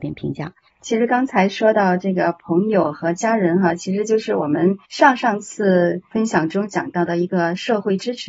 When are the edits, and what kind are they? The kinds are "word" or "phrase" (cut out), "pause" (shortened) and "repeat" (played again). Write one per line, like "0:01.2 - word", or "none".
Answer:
0:04.8 - pause